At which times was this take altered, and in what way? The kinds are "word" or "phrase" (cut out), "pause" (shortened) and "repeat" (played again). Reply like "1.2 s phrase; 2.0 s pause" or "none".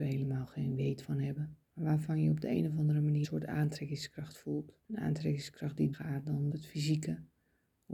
1.6 s pause; 3.2 s word; 4.8 s pause; 5.9 s word; 6.5 s word